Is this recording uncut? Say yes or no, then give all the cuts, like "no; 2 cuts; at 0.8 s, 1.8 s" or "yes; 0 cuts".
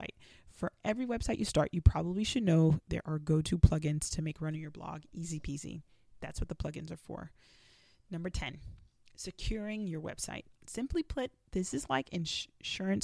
yes; 0 cuts